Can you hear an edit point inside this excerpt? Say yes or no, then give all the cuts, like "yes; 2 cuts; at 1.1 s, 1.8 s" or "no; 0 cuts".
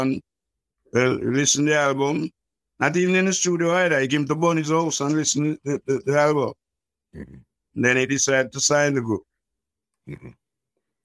no; 0 cuts